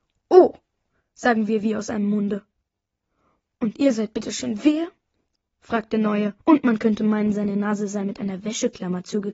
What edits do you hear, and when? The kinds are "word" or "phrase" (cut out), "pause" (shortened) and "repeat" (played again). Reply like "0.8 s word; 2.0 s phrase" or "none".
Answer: 6.4 s pause